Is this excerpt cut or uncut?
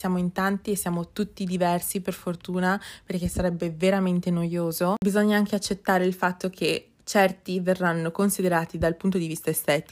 uncut